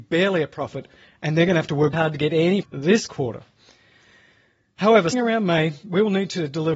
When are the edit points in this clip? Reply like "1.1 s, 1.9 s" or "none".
1.9 s, 2.6 s, 5.1 s